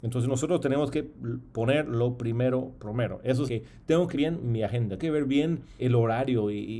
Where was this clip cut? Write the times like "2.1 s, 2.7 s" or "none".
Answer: 3.5 s, 4.1 s, 5.0 s, 5.8 s